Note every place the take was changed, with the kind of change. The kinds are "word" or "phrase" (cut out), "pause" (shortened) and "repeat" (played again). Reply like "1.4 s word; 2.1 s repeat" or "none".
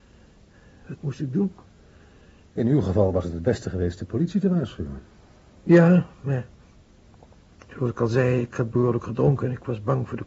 none